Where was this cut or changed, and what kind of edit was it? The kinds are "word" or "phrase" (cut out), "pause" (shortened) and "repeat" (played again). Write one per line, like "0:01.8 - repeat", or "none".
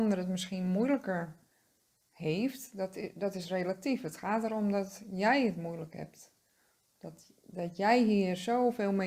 none